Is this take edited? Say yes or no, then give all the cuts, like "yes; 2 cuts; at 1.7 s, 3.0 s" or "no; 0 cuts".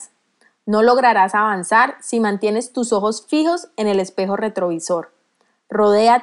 no; 0 cuts